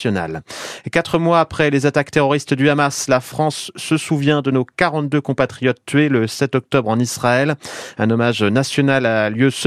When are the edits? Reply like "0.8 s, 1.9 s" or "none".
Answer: none

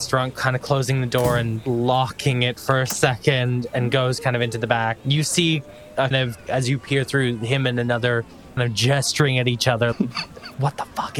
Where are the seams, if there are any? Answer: 6.1 s, 8.6 s, 9.9 s

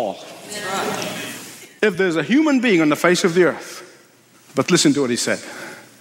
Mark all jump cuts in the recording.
none

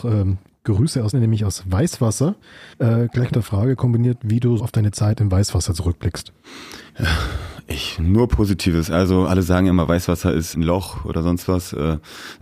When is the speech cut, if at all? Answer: 1.1 s, 2.7 s, 3.3 s, 4.6 s, 6.9 s, 10.5 s

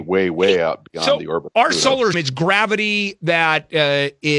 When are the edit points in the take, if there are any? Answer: 2.1 s

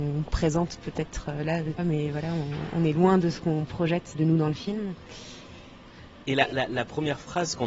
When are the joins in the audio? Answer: 1.8 s, 4.1 s

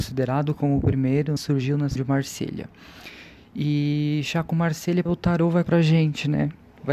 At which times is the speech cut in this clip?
1.4 s, 2.0 s, 5.1 s, 5.6 s

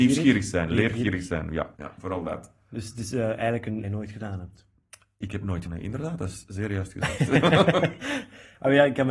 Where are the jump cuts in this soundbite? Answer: 1.7 s, 3.8 s, 5.7 s

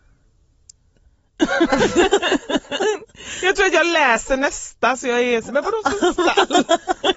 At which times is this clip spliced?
5.5 s

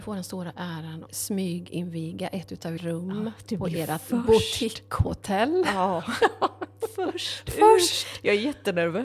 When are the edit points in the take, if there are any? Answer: 1.1 s, 2.8 s, 3.4 s

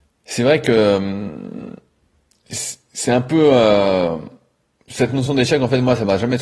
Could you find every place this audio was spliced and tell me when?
none

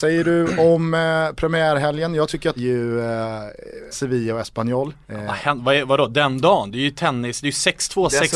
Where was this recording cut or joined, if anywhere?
2.6 s, 3.9 s, 5.0 s

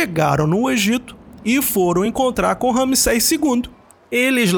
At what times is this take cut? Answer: none

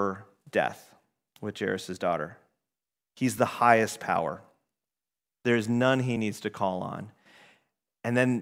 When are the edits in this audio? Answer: none

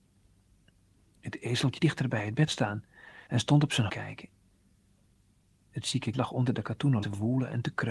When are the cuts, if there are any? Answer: 1.8 s, 2.5 s, 3.3 s, 3.9 s, 6.1 s, 7.0 s

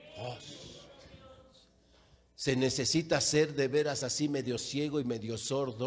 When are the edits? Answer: none

